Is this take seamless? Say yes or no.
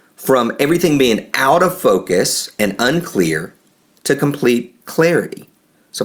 yes